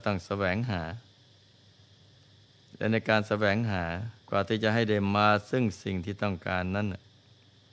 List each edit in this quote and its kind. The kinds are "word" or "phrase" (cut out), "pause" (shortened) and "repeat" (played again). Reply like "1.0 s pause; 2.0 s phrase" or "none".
4.2 s pause

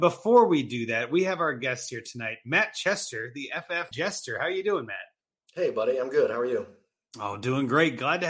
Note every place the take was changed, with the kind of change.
3.9 s word

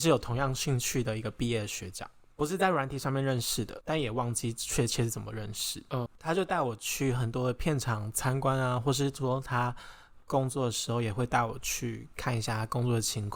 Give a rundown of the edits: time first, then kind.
2.3 s pause; 3.8 s phrase; 6.1 s word

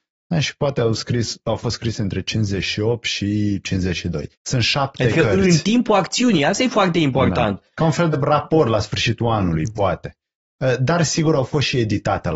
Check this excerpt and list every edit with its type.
4.3 s pause; 8.1 s word

